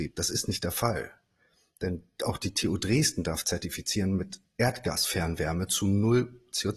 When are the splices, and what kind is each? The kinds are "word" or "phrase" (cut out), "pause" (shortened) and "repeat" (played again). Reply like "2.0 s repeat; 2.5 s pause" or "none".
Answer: none